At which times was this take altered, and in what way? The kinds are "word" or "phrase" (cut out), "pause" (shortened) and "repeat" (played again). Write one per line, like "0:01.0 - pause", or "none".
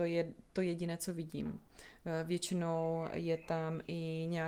none